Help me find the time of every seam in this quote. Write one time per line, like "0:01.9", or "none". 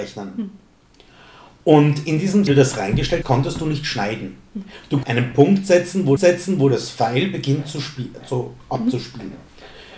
0:02.5
0:03.2
0:05.0
0:06.2